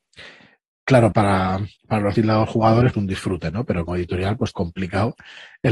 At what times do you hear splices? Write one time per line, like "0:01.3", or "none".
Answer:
0:01.1
0:01.8
0:02.1
0:02.9
0:03.9
0:04.5